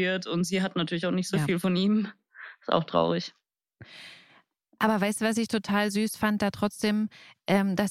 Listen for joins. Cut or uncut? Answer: uncut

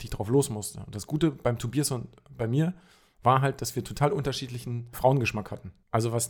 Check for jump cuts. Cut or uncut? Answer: uncut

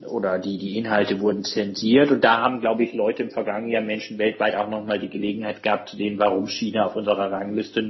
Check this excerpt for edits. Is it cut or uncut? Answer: uncut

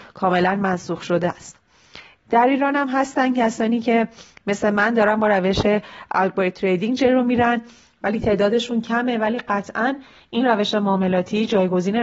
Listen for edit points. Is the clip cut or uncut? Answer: uncut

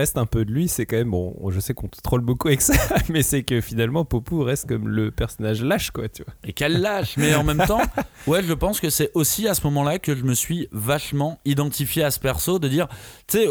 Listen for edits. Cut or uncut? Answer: uncut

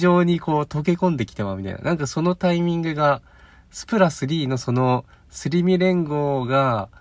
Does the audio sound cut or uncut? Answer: uncut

